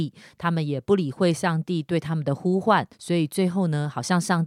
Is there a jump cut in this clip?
yes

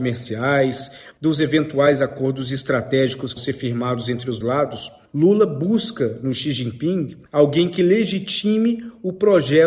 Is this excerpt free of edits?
no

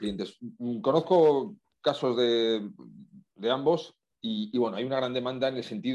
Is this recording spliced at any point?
no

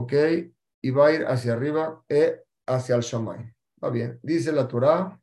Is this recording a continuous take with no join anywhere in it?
yes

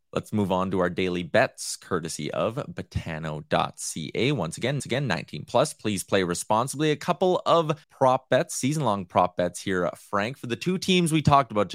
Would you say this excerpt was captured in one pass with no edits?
no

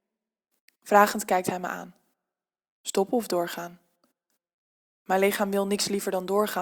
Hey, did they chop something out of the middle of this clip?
no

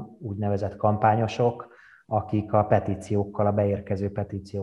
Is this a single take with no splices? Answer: yes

